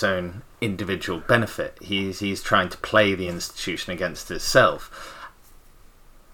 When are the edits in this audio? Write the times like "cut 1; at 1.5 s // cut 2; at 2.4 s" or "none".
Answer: none